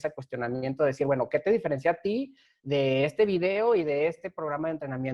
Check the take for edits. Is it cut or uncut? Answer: uncut